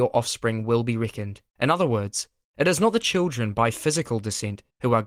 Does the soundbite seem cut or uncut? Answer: cut